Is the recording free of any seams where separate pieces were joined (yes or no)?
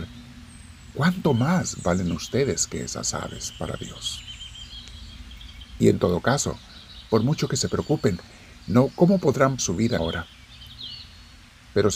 no